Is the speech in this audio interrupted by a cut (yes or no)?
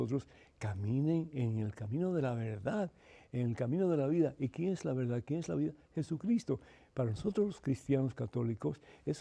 no